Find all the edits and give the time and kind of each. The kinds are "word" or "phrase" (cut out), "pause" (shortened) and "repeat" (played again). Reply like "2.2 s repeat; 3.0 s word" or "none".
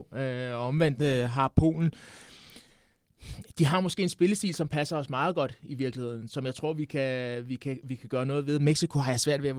none